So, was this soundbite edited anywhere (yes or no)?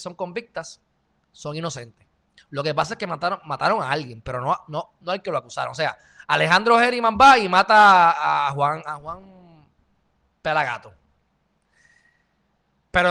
no